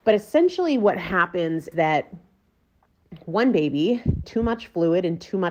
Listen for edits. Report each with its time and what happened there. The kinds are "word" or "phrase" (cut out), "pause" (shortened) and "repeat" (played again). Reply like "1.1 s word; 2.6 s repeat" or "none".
1.7 s word; 4.2 s phrase